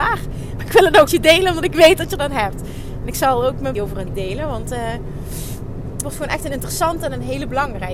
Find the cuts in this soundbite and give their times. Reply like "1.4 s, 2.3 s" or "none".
1.1 s, 2.2 s, 3.8 s, 4.1 s, 6.0 s